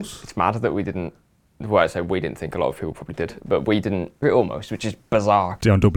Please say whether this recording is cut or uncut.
cut